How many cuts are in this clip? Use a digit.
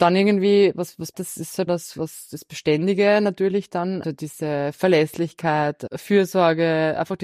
3